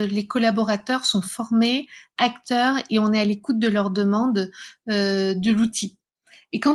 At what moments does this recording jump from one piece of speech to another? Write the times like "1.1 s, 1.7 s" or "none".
none